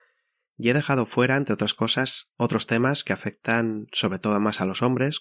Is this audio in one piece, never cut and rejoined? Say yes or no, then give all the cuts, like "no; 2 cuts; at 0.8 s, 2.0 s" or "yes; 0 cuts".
yes; 0 cuts